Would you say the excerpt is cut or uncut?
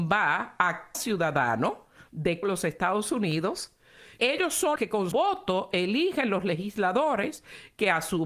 cut